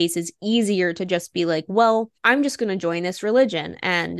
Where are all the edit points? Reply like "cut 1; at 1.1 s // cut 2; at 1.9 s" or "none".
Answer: cut 1; at 2.2 s